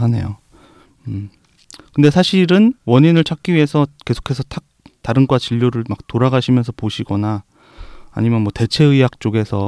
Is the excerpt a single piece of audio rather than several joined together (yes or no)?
no